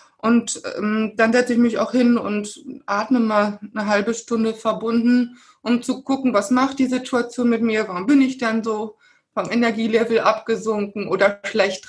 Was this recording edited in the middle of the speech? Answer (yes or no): no